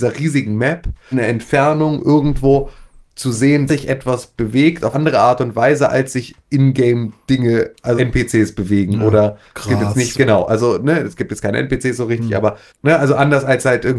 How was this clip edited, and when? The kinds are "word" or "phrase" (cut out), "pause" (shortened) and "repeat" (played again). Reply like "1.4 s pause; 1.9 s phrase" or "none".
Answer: 1.1 s word; 3.7 s word; 4.9 s word; 8.0 s word; 10.1 s word; 12.7 s word